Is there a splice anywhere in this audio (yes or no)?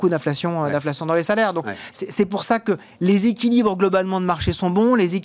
no